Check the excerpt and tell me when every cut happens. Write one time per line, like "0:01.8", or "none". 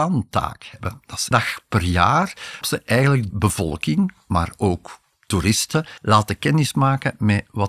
0:01.3
0:02.6
0:03.3
0:06.0